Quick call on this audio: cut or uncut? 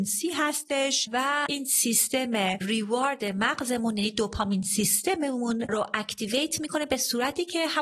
uncut